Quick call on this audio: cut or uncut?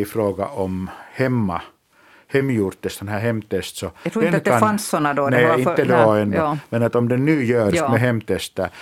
uncut